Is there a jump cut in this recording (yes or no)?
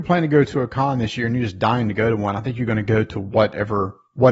no